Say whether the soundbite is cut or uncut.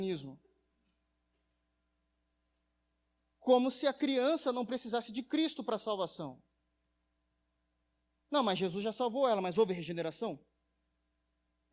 uncut